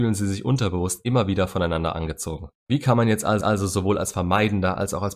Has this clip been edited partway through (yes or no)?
yes